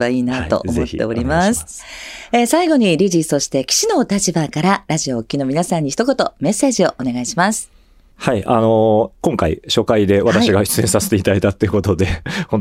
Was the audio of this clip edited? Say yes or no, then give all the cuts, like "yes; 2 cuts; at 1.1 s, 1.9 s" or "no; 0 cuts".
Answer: no; 0 cuts